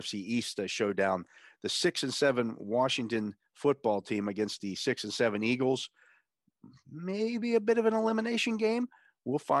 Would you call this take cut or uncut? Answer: uncut